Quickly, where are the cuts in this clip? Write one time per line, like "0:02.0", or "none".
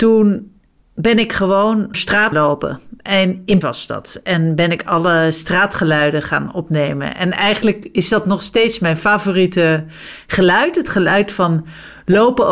0:01.9
0:02.3
0:03.6